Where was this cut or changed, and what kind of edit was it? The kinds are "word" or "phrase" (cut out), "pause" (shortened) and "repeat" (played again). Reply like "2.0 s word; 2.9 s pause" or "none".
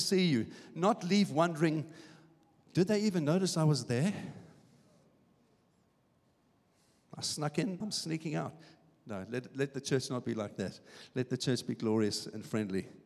7.8 s phrase